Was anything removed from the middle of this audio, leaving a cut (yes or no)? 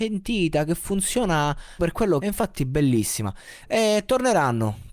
yes